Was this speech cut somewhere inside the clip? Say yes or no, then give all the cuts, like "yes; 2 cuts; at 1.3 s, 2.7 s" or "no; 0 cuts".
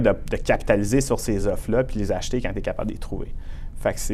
no; 0 cuts